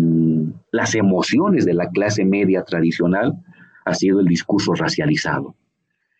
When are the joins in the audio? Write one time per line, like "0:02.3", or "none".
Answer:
none

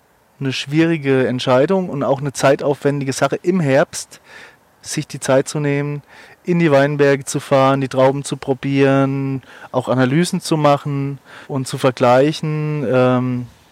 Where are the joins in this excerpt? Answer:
0:11.4

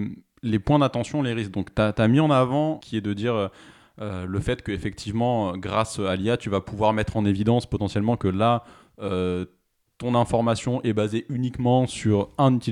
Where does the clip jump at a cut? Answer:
0:02.8

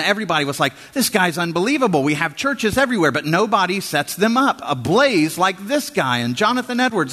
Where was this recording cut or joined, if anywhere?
none

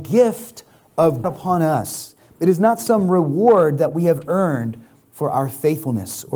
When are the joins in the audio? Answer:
0:01.2

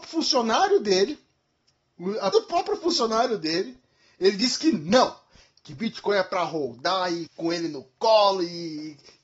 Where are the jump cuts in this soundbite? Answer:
0:02.3
0:07.3

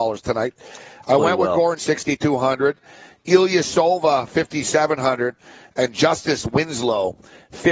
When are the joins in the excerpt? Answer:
0:01.8

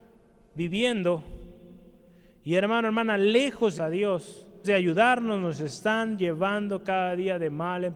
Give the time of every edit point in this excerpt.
0:03.8
0:04.6

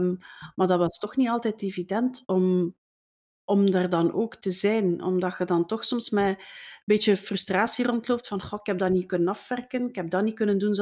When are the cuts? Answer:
none

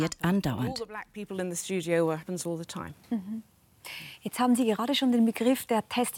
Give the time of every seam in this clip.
0:02.2

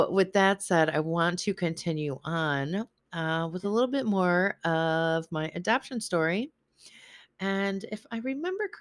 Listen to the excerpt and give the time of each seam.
none

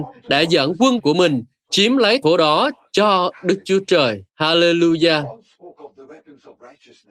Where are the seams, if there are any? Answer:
0:01.0
0:02.2
0:04.3

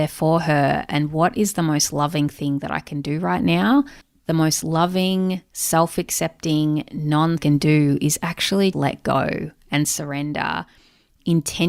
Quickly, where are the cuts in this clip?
0:04.0
0:07.4
0:08.7

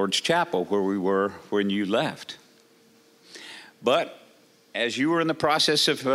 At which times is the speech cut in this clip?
none

